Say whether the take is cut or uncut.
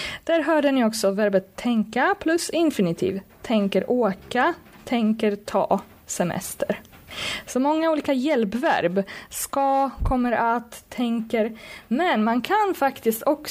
uncut